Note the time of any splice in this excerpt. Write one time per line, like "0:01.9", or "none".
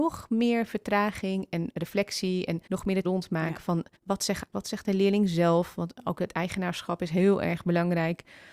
0:02.7
0:03.0
0:04.0
0:04.5